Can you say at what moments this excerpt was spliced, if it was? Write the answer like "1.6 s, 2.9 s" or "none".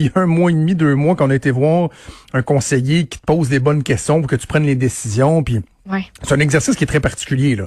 6.1 s